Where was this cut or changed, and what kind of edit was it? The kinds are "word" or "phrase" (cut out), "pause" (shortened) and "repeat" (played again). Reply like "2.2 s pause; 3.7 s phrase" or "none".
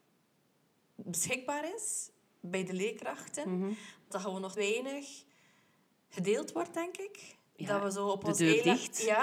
4.1 s word; 4.6 s word